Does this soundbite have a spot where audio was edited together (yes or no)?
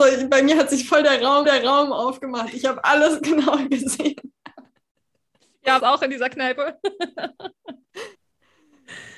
yes